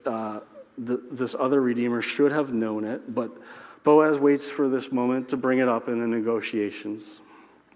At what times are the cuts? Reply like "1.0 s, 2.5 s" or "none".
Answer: none